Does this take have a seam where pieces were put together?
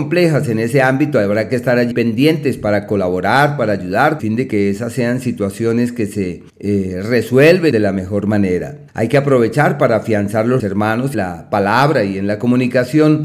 yes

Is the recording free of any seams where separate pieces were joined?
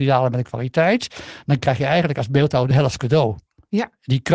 yes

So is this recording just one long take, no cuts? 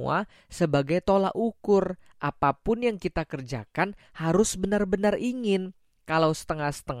yes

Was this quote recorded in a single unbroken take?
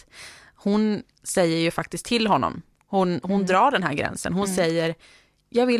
yes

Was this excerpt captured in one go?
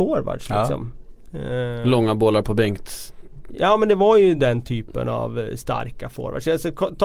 yes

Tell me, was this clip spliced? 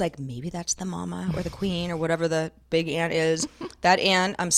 no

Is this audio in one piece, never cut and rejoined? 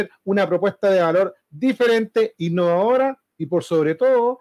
yes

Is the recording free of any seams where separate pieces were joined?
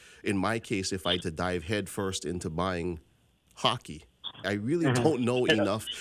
no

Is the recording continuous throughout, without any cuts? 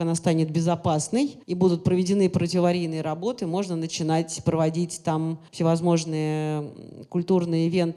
no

